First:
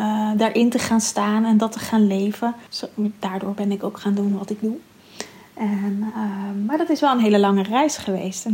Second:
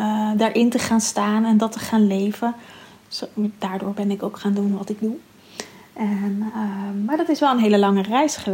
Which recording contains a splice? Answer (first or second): first